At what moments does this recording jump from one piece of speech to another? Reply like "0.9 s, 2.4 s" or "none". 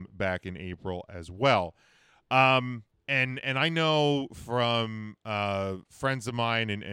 2.9 s